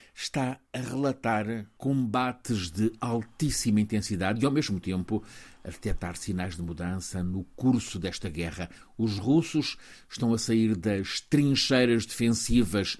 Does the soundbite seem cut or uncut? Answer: uncut